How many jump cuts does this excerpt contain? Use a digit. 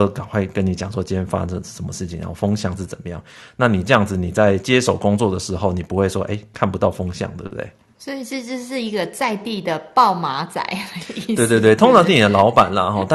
0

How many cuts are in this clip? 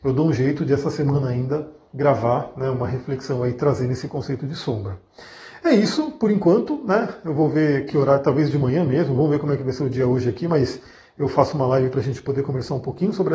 0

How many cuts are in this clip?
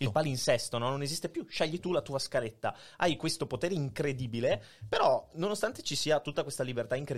1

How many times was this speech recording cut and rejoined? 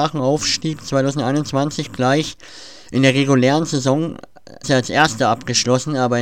1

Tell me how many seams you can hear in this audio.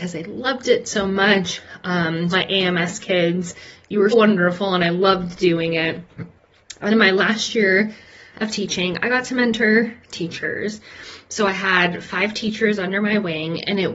4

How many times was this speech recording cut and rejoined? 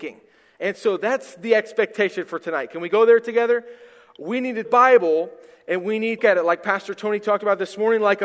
2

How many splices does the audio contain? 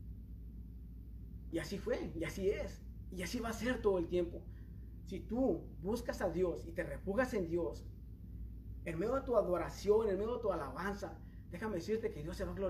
0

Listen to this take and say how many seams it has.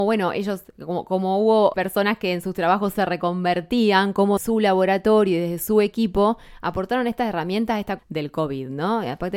3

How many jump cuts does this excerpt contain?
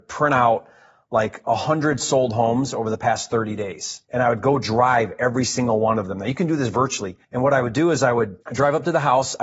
3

